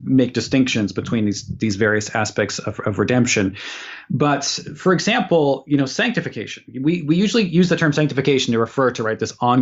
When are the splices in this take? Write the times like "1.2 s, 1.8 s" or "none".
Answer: none